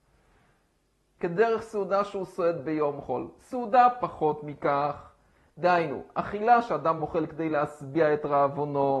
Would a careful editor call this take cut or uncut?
uncut